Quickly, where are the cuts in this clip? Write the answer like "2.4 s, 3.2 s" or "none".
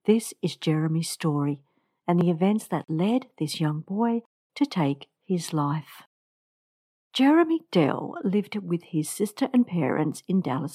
none